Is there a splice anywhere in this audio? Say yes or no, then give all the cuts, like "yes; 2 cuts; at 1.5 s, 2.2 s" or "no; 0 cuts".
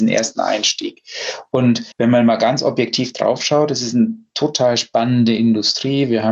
yes; 1 cut; at 1.9 s